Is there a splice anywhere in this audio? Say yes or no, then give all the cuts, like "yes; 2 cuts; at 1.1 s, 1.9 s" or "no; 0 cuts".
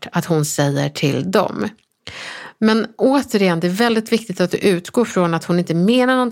no; 0 cuts